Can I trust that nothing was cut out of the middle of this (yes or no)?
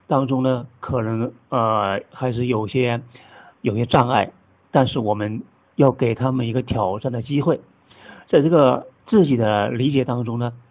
yes